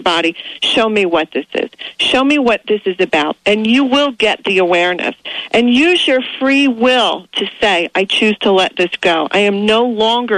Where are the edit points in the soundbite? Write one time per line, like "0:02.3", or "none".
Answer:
none

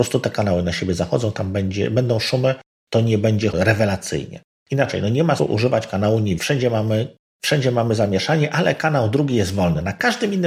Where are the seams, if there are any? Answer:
0:03.5
0:05.4
0:06.4

